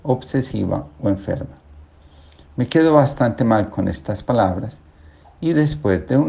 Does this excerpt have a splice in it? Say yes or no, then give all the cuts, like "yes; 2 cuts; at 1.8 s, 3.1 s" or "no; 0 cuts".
no; 0 cuts